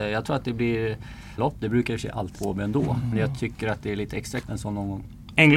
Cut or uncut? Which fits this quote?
cut